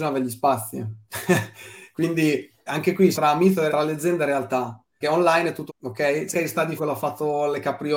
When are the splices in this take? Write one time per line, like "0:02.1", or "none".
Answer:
0:02.7
0:03.1
0:03.7
0:05.0
0:05.7
0:06.3
0:06.8